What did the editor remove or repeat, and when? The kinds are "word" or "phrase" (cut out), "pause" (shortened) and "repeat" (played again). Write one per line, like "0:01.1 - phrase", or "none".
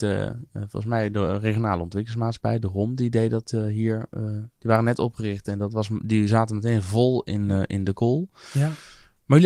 none

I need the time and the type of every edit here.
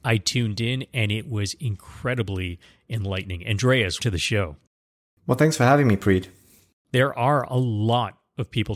0:04.0 - word

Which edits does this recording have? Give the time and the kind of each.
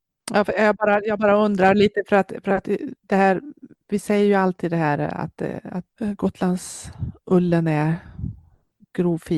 none

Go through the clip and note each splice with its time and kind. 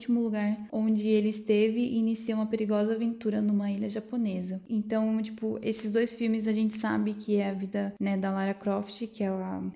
none

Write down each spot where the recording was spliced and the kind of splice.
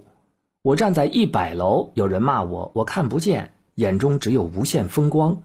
none

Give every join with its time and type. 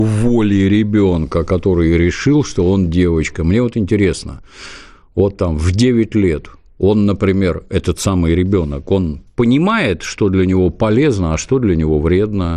none

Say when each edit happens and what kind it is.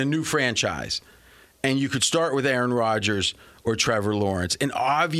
none

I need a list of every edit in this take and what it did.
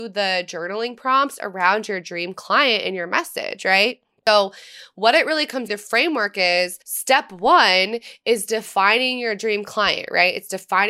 0:05.7 - phrase
0:06.8 - pause

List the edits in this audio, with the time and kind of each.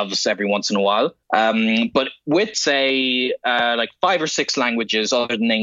0:01.2 - pause
0:02.5 - phrase

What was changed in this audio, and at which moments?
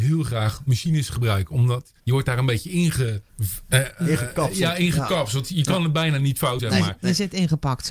0:02.0 - pause
0:03.3 - pause
0:06.6 - word

